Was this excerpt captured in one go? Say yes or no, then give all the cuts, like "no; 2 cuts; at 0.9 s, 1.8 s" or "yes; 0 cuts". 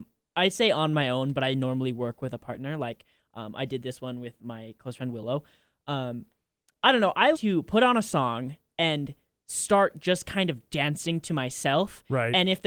no; 1 cut; at 7.3 s